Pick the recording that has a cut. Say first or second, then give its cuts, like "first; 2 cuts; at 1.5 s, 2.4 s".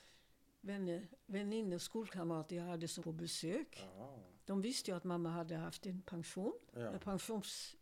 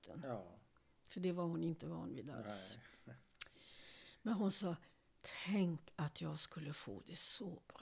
first; 1 cut; at 3.0 s